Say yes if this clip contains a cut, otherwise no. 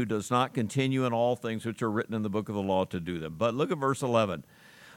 no